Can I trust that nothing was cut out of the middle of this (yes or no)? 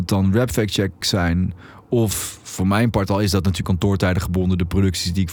no